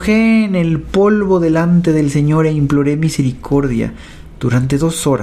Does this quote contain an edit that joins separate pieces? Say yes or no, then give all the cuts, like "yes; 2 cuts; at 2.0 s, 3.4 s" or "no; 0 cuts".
no; 0 cuts